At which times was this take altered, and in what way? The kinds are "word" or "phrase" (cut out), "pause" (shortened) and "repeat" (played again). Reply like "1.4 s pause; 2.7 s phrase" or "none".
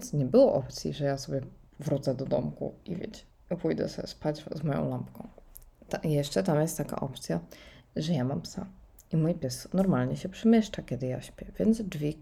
none